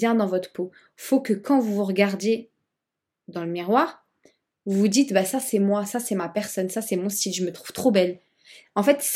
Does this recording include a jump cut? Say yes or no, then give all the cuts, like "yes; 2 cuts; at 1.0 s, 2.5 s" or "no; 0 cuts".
no; 0 cuts